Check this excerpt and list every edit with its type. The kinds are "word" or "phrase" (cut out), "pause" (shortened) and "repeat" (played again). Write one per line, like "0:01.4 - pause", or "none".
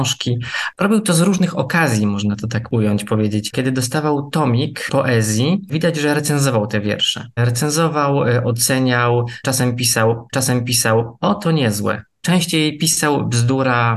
0:10.3 - repeat